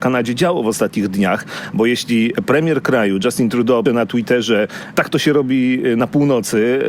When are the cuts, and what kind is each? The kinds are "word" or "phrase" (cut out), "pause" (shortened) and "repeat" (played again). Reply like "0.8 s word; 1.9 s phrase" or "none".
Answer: 3.9 s word; 4.9 s word